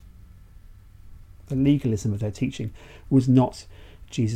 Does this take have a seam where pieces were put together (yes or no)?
no